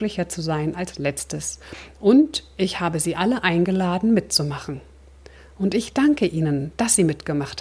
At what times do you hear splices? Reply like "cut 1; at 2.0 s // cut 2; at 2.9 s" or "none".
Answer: none